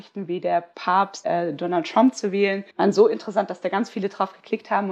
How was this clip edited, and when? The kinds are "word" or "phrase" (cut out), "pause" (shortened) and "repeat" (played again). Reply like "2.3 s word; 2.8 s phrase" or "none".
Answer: 1.2 s word; 2.7 s pause

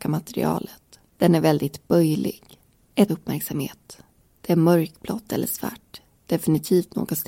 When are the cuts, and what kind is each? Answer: 1.1 s pause; 3.1 s phrase

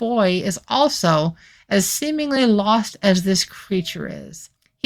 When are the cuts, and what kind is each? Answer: none

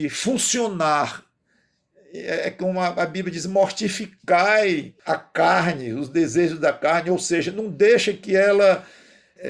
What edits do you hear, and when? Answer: 5.1 s word

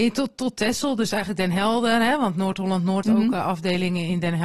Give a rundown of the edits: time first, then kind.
3.0 s word

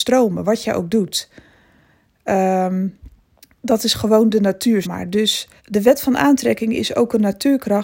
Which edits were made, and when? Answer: 3.4 s pause; 4.8 s word; 5.6 s pause

